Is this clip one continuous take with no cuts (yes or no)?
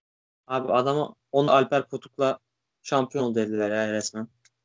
no